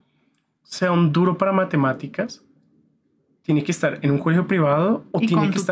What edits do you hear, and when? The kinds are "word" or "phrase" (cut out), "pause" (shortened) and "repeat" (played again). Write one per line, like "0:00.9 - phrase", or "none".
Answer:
none